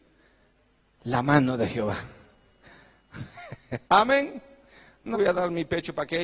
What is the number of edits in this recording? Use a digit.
2